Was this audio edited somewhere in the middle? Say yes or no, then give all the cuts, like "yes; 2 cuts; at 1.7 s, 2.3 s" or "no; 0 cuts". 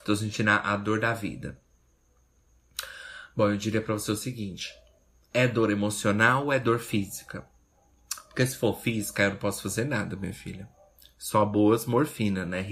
no; 0 cuts